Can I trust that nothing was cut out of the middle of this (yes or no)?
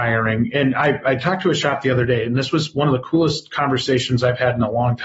yes